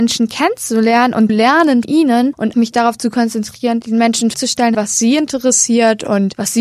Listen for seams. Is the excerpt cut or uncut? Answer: cut